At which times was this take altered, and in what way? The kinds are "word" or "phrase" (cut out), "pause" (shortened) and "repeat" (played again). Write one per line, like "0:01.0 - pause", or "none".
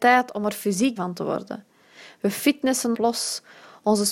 0:01.0 - word
0:02.9 - word